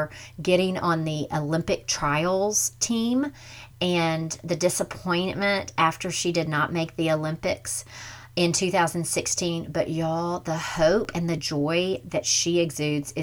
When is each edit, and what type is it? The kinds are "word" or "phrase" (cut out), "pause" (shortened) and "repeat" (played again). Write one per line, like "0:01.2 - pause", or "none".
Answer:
none

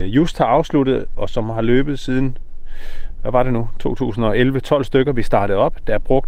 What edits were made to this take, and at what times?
none

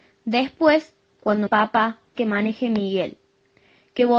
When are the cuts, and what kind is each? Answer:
0:01.5 - word
0:02.2 - phrase

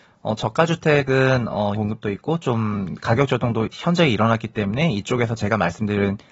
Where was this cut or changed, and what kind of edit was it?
0:01.7 - word

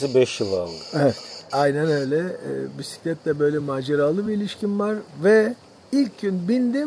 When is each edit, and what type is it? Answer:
none

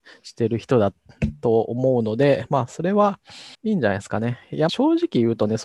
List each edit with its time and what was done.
0:03.5 - pause
0:04.7 - phrase

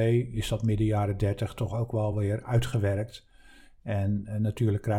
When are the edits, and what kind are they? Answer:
none

